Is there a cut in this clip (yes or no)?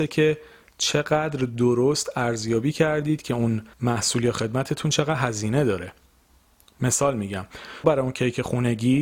yes